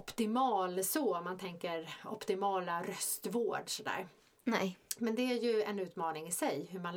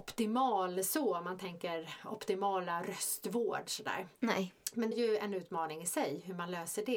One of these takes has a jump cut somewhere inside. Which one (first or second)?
second